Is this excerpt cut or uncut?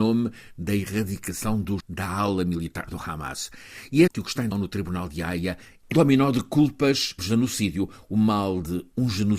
cut